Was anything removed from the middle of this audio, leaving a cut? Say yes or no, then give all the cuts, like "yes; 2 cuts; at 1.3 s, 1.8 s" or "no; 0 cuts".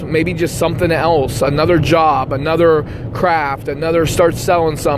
no; 0 cuts